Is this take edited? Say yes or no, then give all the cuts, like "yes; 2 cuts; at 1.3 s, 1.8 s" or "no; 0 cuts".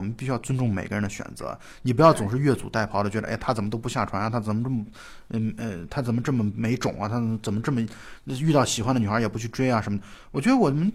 no; 0 cuts